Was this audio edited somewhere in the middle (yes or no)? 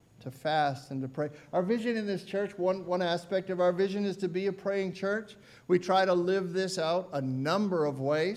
no